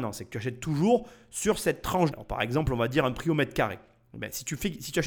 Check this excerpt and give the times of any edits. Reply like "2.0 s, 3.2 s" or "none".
2.1 s